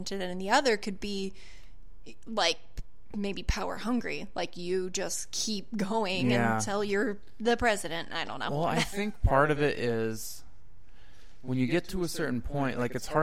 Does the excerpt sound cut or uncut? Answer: uncut